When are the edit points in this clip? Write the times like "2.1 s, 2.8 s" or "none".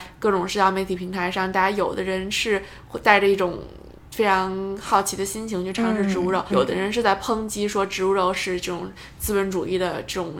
6.5 s